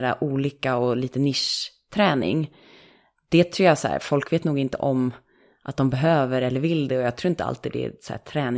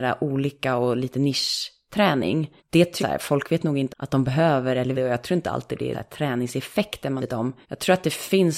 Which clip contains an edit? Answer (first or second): second